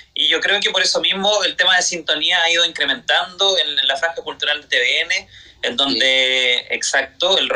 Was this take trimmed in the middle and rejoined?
no; 0 cuts

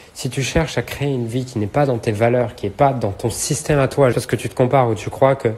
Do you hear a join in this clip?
yes; 1 cut; at 4.1 s

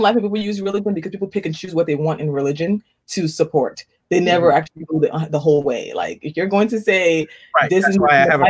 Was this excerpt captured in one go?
yes; 0 cuts

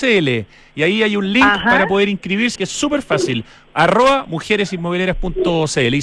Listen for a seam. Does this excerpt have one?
yes; 1 cut; at 2.6 s

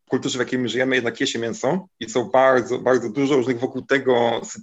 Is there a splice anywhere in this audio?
yes; 1 cut; at 1.9 s

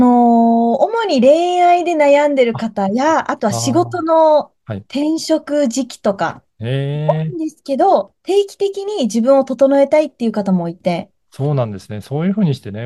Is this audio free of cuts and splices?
yes; 0 cuts

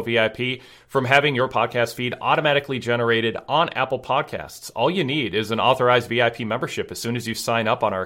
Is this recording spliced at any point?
no; 0 cuts

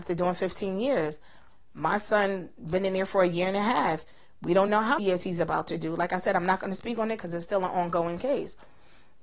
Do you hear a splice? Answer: yes; 2 cuts; at 4.7 s, 5.0 s

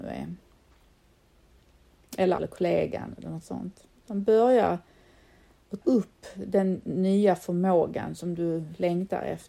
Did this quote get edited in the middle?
yes; 2 cuts; at 2.4 s, 5.8 s

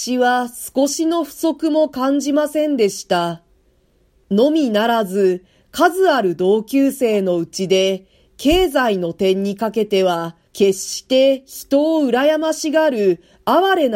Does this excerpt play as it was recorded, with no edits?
no; 1 cut; at 10.5 s

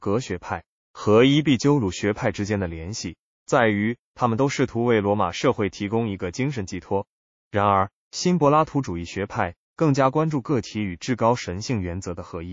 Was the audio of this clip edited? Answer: no; 0 cuts

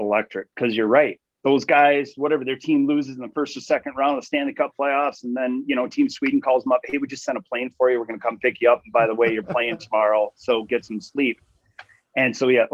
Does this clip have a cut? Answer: no; 0 cuts

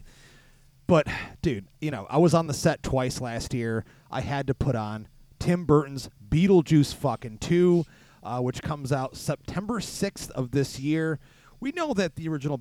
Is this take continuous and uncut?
yes; 0 cuts

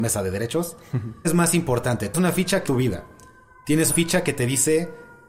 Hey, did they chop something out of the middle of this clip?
yes; 4 cuts; at 1.2 s, 2.1 s, 2.6 s, 3.9 s

